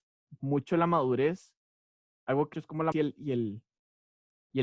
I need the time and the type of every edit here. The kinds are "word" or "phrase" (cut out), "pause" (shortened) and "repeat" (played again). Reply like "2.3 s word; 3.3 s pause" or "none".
2.1 s pause; 2.5 s phrase; 2.9 s word